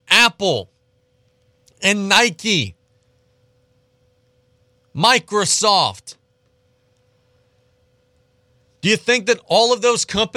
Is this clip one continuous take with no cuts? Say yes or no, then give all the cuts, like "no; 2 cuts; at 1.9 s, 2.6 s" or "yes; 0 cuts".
yes; 0 cuts